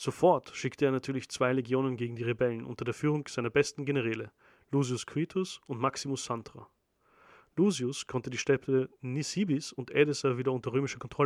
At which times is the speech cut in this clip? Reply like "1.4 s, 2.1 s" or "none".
none